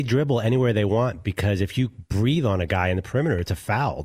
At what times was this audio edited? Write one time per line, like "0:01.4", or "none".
none